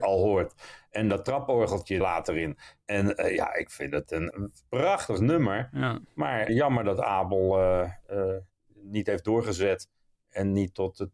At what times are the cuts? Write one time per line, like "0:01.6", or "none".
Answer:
0:02.0
0:04.3
0:06.5